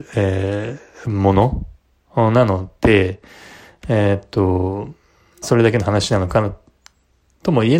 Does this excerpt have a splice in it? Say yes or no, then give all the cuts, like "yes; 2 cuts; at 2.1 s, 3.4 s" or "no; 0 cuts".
yes; 1 cut; at 5.4 s